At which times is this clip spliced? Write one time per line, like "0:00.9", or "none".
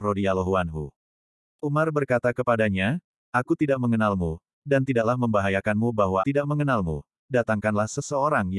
0:06.2